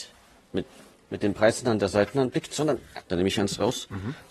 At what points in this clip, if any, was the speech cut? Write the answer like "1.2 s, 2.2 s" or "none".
3.1 s